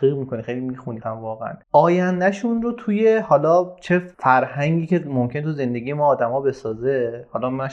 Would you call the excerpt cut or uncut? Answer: cut